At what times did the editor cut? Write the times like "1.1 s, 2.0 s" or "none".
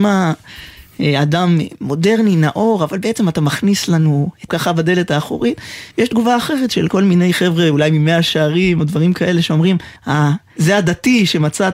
4.5 s, 10.0 s, 10.6 s